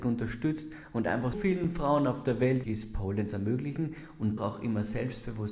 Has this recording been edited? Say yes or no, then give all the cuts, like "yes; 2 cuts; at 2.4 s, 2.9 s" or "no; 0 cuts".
yes; 3 cuts; at 1.3 s, 2.6 s, 4.4 s